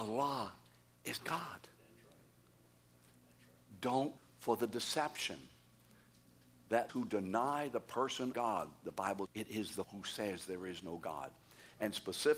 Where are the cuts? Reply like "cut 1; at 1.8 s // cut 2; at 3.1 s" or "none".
cut 1; at 1.2 s // cut 2; at 4.2 s // cut 3; at 6.9 s // cut 4; at 8.3 s // cut 5; at 9.3 s // cut 6; at 9.8 s